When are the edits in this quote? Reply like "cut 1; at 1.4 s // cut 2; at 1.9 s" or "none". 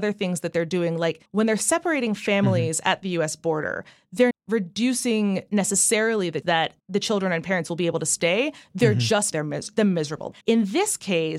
cut 1; at 1.3 s // cut 2; at 4.3 s // cut 3; at 6.4 s // cut 4; at 6.8 s // cut 5; at 9.3 s // cut 6; at 10.4 s

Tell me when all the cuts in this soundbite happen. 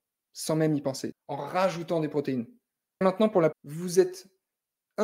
cut 1; at 1.1 s // cut 2; at 3.0 s // cut 3; at 3.5 s

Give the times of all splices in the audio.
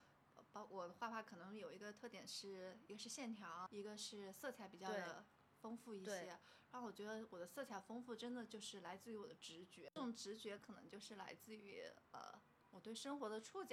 cut 1; at 3.7 s

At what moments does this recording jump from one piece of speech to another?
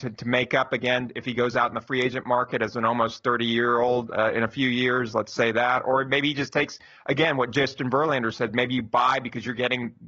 none

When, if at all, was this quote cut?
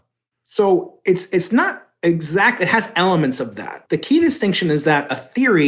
cut 1; at 3.9 s

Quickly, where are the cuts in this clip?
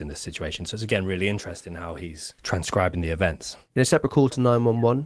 cut 1; at 2.4 s

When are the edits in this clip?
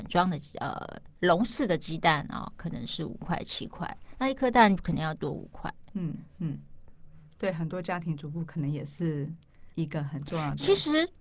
cut 1; at 9.7 s

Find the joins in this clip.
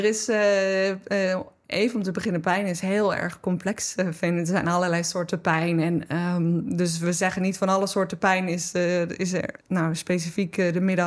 cut 1; at 9.6 s

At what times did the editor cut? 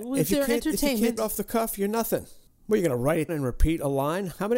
cut 1; at 1.2 s // cut 2; at 2.5 s // cut 3; at 3.3 s

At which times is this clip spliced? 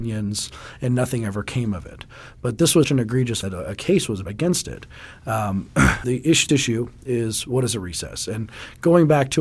cut 1; at 2.8 s // cut 2; at 3.4 s // cut 3; at 4.2 s // cut 4; at 6.0 s // cut 5; at 6.5 s

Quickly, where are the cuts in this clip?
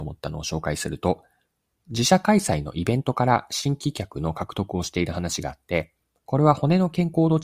none

